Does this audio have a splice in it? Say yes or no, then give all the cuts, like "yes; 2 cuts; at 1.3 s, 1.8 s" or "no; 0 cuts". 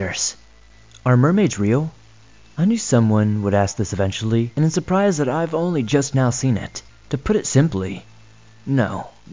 yes; 1 cut; at 6.9 s